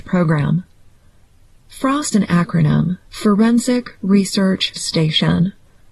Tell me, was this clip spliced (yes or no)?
yes